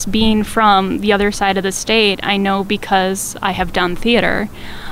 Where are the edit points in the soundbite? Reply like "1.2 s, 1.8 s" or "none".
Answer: none